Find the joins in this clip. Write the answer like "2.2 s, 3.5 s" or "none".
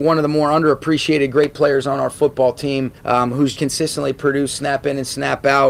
3.0 s, 3.5 s